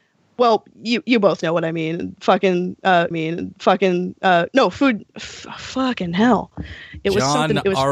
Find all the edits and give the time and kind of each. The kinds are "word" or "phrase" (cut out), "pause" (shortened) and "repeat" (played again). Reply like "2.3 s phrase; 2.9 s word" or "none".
3.1 s repeat; 5.1 s pause